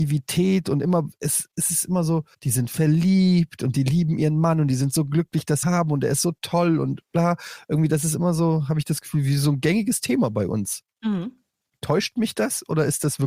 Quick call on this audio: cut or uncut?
cut